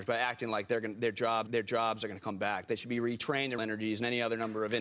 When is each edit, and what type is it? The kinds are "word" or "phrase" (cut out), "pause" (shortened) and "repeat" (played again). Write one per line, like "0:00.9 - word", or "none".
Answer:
0:01.5 - repeat
0:03.6 - word